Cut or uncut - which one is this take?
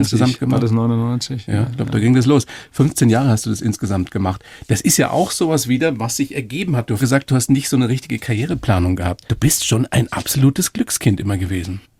cut